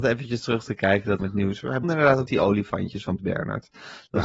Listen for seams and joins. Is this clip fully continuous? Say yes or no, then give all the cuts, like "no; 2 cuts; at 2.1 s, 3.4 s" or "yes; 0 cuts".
no; 4 cuts; at 1.2 s, 1.8 s, 2.3 s, 3.2 s